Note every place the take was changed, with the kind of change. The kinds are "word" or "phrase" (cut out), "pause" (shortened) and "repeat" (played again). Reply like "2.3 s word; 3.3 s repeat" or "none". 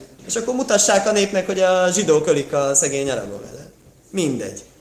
none